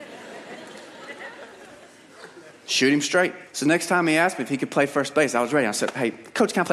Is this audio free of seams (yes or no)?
no